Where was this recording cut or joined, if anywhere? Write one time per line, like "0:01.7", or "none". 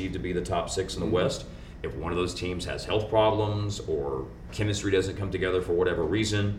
0:04.5